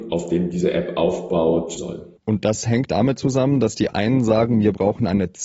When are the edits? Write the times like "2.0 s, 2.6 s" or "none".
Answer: 1.8 s, 2.2 s, 2.9 s